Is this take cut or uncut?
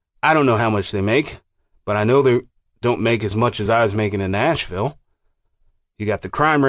uncut